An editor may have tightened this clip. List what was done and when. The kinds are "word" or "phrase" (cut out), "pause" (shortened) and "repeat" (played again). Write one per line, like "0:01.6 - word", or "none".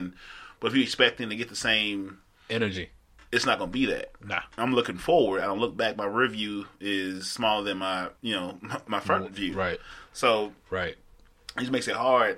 0:08.2 - pause